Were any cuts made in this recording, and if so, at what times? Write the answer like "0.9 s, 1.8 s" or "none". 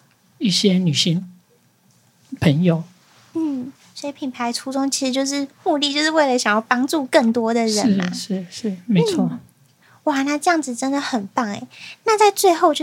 none